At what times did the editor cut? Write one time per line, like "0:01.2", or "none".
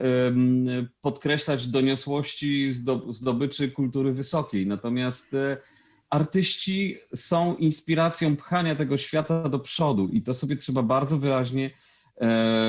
none